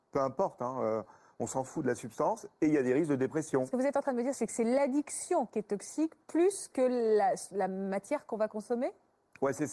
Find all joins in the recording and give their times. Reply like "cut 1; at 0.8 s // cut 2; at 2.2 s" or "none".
none